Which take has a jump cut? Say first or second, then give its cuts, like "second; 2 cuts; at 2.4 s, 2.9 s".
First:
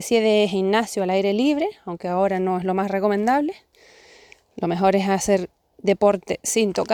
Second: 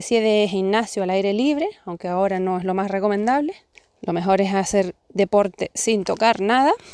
second; 2 cuts; at 3.8 s, 5.0 s